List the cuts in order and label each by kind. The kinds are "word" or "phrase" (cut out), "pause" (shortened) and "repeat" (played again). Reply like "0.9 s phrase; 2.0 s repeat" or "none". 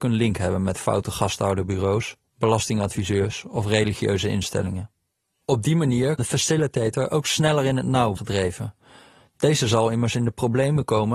6.2 s word; 8.2 s word